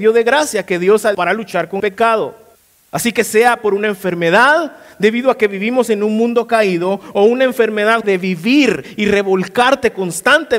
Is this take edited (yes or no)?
yes